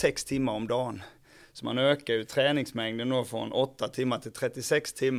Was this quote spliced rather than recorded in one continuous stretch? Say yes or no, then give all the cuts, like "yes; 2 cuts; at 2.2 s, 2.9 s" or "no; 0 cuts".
no; 0 cuts